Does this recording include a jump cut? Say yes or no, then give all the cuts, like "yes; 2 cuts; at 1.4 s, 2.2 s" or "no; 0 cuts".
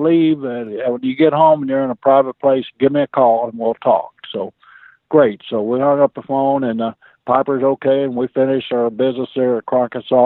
no; 0 cuts